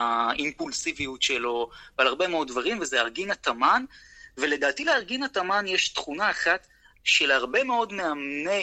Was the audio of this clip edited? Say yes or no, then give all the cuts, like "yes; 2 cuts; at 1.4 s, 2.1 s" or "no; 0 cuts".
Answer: no; 0 cuts